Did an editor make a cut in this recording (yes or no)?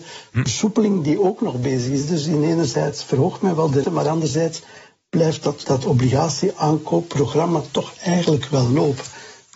yes